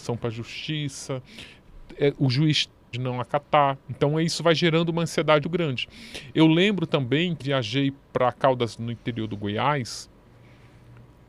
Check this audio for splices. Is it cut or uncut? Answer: cut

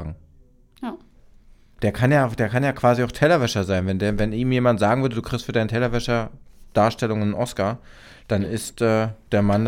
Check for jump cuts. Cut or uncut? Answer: uncut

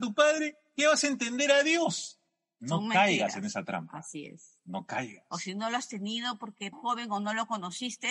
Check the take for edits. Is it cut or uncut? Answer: cut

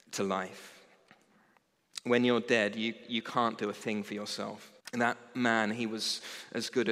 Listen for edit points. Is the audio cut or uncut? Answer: cut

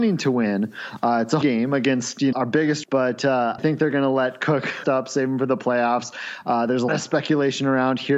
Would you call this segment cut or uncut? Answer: cut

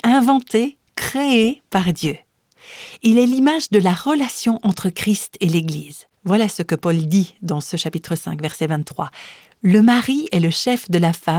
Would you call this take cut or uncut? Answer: cut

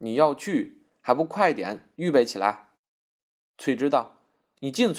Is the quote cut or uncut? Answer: cut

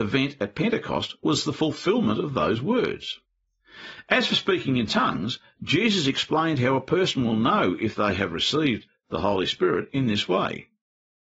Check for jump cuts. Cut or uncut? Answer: uncut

